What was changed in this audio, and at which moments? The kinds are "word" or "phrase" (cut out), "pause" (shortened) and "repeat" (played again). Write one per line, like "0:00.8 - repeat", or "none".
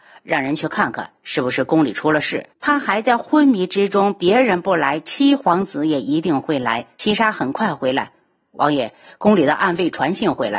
0:02.5 - pause
0:06.9 - pause